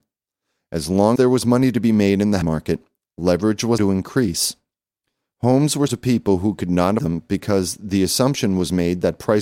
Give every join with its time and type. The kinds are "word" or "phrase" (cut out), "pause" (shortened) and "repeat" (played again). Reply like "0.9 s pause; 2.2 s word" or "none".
1.2 s word; 2.4 s word; 3.8 s word; 5.9 s word; 7.0 s word